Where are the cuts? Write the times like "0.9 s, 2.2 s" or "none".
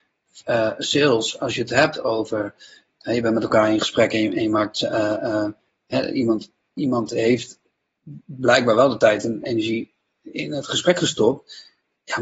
none